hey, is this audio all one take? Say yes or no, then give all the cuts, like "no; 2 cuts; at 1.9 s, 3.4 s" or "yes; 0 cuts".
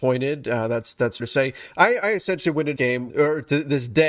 no; 3 cuts; at 1.2 s, 2.8 s, 3.1 s